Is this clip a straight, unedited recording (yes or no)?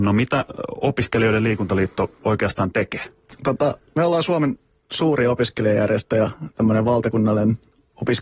yes